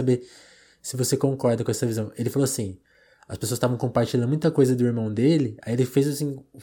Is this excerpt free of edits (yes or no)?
yes